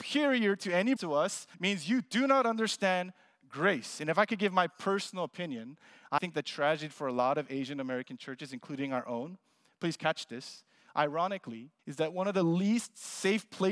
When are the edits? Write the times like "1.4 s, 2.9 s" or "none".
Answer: 1.0 s, 1.5 s, 6.2 s, 11.8 s